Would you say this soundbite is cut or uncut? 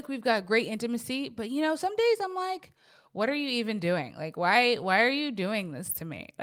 uncut